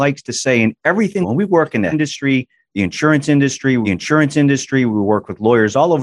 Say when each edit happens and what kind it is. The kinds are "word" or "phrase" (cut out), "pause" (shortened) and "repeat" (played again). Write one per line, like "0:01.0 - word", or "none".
0:01.2 - phrase
0:01.9 - word
0:03.8 - repeat